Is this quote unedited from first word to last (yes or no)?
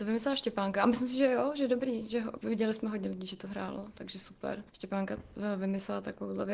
no